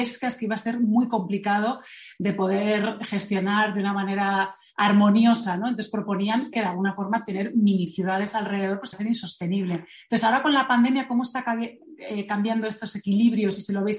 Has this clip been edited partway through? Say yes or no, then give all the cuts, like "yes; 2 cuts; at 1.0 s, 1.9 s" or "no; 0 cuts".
yes; 2 cuts; at 6.5 s, 8.9 s